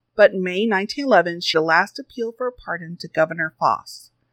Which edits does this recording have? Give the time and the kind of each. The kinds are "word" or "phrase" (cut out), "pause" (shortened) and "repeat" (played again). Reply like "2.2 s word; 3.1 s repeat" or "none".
1.5 s word